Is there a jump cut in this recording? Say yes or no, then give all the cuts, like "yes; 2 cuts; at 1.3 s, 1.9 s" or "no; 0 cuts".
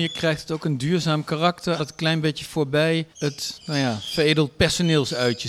yes; 2 cuts; at 1.8 s, 3.1 s